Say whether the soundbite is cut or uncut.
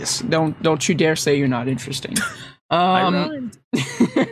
uncut